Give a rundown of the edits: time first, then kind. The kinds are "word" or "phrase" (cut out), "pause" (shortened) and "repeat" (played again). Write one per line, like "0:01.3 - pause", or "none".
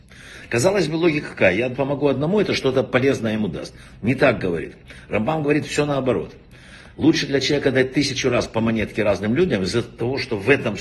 0:01.7 - word